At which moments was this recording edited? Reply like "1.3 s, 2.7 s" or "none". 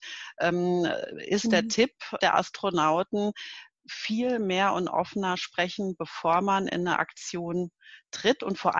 2.2 s